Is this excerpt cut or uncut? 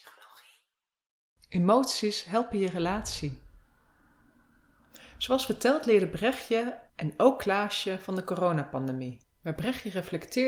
cut